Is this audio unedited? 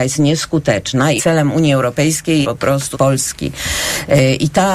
no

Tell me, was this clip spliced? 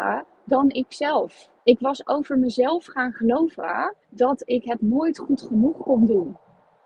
yes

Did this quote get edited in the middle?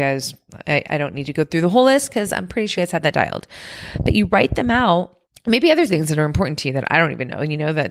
yes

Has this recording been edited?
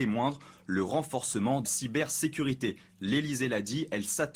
yes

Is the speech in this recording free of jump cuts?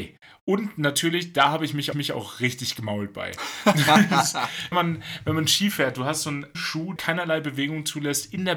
no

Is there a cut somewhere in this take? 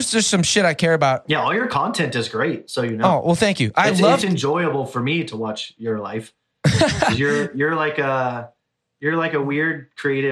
no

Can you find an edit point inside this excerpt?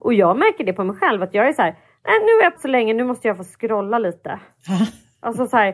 yes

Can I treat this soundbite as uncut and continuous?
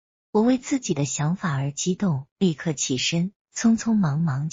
no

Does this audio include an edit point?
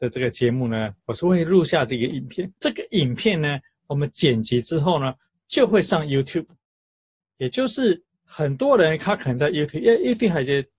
yes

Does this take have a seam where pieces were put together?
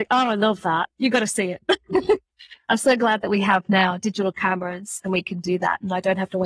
no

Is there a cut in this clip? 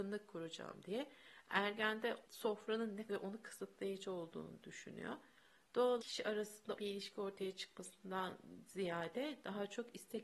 yes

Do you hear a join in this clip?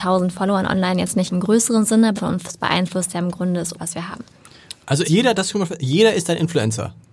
yes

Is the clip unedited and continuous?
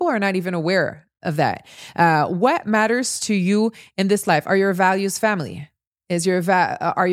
yes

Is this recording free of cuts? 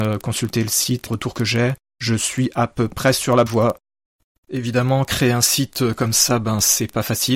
no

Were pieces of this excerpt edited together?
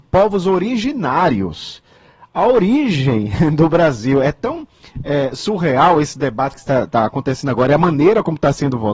no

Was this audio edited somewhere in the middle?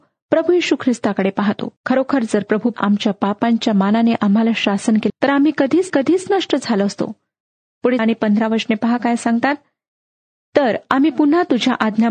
yes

